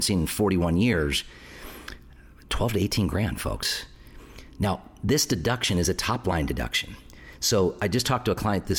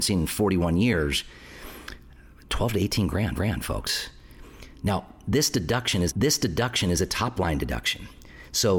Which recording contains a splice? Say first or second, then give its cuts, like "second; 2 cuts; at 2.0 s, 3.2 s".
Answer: second; 2 cuts; at 3.3 s, 6.1 s